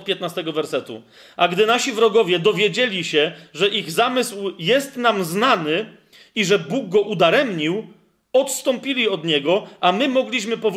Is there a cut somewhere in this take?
no; 0 cuts

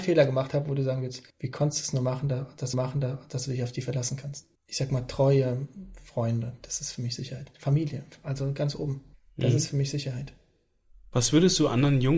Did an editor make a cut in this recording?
yes; 4 cuts; at 1.3 s, 2.7 s, 4.5 s, 9.1 s

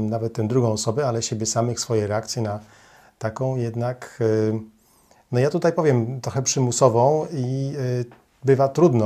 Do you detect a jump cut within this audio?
no; 0 cuts

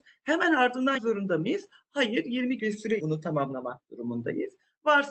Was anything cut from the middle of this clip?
yes; 3 cuts; at 1.0 s, 2.6 s, 3.0 s

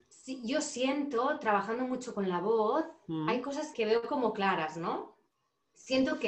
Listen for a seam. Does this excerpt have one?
yes; 1 cut; at 3.7 s

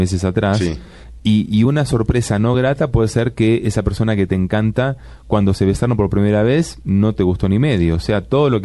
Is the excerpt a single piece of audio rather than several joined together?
yes; 0 cuts

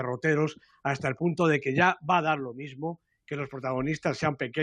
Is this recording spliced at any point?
no; 0 cuts

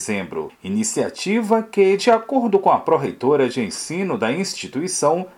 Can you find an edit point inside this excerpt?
no; 0 cuts

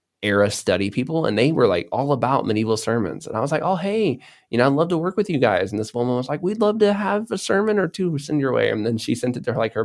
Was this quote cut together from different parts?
no; 0 cuts

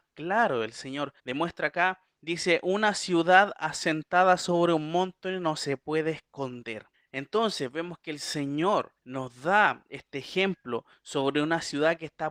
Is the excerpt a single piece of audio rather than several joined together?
no; 3 cuts; at 1.2 s, 6.9 s, 9.0 s

